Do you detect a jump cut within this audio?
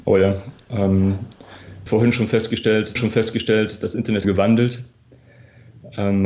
yes; 3 cuts; at 1.9 s, 3.0 s, 4.2 s

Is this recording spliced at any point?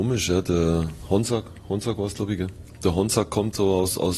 no; 0 cuts

